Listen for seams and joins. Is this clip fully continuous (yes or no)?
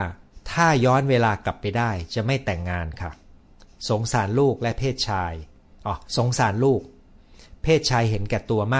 no